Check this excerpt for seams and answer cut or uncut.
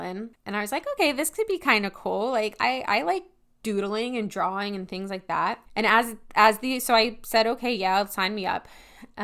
cut